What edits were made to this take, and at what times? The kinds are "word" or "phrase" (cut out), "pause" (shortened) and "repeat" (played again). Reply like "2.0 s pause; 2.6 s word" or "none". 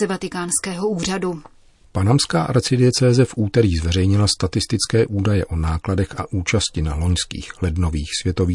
none